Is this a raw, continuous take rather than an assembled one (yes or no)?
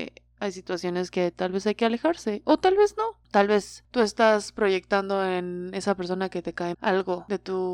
no